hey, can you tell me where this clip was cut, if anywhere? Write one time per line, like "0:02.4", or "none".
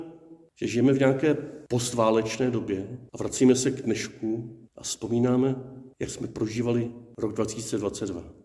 0:03.1
0:04.7